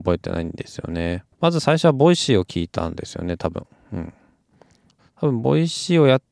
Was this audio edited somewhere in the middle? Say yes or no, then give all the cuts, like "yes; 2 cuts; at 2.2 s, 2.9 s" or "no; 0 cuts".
yes; 2 cuts; at 1.3 s, 5.0 s